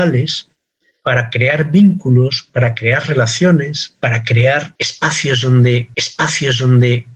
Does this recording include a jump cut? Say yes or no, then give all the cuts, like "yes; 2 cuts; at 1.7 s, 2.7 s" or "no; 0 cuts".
yes; 1 cut; at 5.9 s